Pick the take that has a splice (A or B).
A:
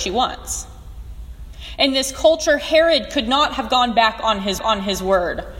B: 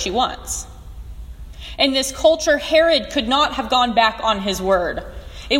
A